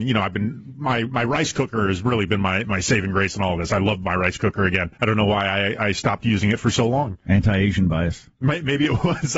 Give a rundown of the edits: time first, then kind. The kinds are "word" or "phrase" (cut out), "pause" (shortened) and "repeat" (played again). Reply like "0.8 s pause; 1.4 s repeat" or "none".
5.0 s pause